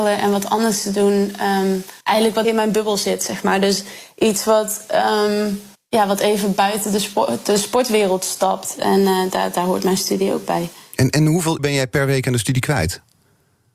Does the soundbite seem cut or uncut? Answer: cut